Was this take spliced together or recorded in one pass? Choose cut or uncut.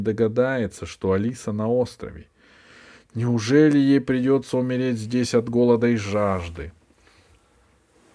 uncut